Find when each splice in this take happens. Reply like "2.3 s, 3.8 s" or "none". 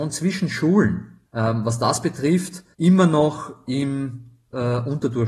1.3 s, 2.7 s